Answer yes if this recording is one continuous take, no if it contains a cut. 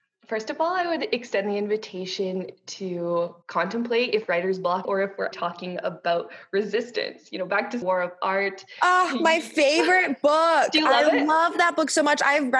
no